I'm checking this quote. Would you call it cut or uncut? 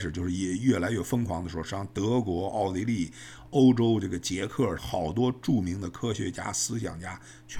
cut